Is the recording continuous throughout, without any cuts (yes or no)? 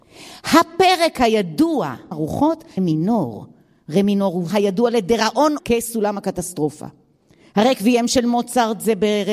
no